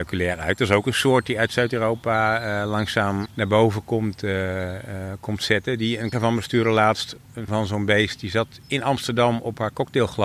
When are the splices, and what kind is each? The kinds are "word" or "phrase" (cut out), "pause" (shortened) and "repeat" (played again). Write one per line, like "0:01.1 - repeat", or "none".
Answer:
0:03.3 - word
0:06.1 - word
0:07.5 - word